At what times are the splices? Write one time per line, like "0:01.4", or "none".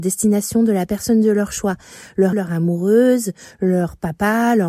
0:02.3